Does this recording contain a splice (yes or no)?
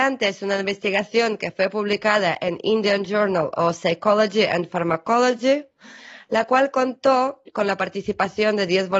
no